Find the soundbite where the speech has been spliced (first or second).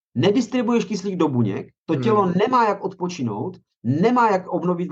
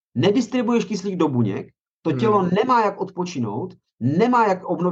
first